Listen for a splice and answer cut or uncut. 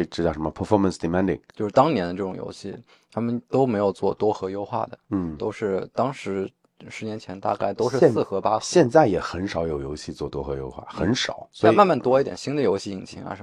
uncut